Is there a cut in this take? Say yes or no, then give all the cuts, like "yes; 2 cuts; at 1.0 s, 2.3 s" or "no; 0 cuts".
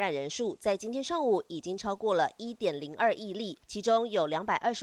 yes; 1 cut; at 3.6 s